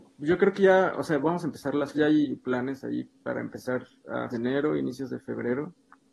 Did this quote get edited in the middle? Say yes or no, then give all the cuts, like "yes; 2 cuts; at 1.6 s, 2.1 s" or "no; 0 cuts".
yes; 2 cuts; at 1.9 s, 4.3 s